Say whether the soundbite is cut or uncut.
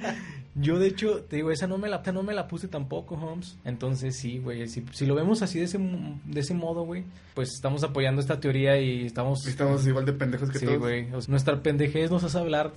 cut